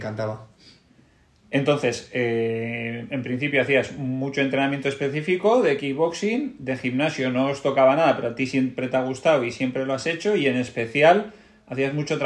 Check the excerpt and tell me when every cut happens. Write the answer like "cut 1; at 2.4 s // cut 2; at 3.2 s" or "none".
none